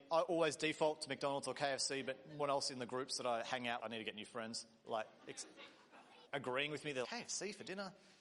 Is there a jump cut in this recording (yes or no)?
yes